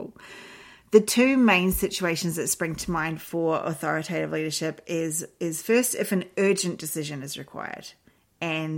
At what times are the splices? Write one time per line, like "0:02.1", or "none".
none